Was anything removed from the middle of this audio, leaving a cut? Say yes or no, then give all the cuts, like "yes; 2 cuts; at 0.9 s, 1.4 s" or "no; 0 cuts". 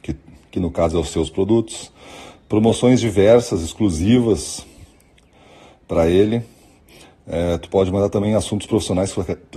no; 0 cuts